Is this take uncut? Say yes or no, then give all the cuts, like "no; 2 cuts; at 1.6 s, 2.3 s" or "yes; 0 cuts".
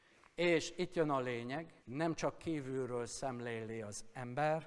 no; 1 cut; at 1.8 s